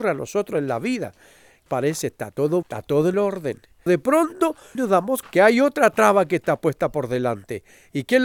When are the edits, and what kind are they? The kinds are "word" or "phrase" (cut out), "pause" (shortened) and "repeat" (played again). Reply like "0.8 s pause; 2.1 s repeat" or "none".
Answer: 1.7 s phrase; 2.6 s word; 3.1 s word; 3.9 s phrase; 4.7 s phrase; 5.2 s word